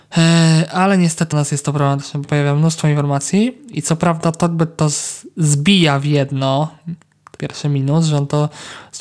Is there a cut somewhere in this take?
yes; 3 cuts; at 1.3 s, 2.2 s, 7.4 s

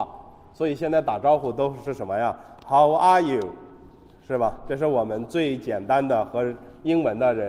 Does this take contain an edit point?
no; 0 cuts

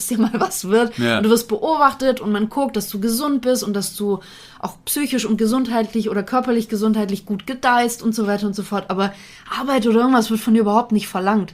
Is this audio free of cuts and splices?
yes; 0 cuts

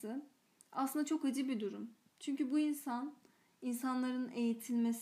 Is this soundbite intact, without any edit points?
yes; 0 cuts

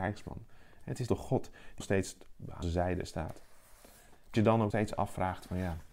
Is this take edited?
yes; 5 cuts; at 1.1 s, 1.8 s, 2.6 s, 4.3 s, 4.7 s

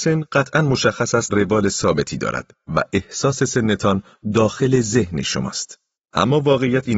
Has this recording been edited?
yes; 2 cuts; at 1.3 s, 6.0 s

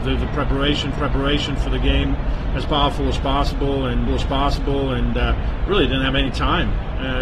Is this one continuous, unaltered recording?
no; 2 cuts; at 0.9 s, 4.1 s

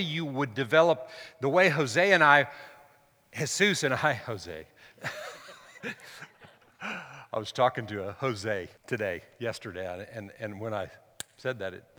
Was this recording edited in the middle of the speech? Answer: yes; 1 cut; at 8.8 s

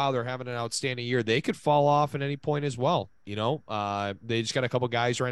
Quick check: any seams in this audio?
yes; 1 cut; at 4.2 s

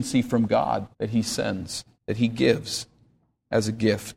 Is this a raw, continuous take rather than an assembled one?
no; 2 cuts; at 0.9 s, 1.9 s

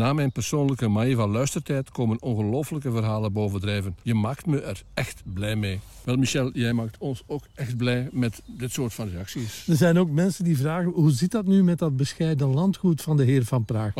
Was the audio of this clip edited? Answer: no; 0 cuts

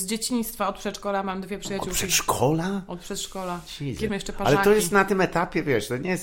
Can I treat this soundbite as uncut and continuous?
no; 1 cut; at 4.1 s

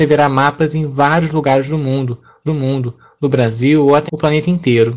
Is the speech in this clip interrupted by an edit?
yes; 2 cuts; at 2.5 s, 4.1 s

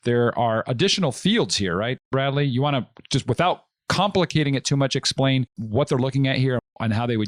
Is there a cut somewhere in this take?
yes; 1 cut; at 2.0 s

